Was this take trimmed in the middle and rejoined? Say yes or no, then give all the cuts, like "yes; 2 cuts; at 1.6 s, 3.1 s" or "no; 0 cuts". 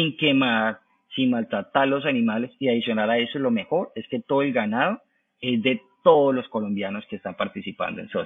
no; 0 cuts